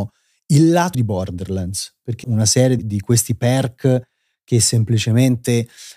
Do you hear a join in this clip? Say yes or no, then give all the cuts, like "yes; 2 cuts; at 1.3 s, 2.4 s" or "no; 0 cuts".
yes; 3 cuts; at 0.9 s, 2.2 s, 2.8 s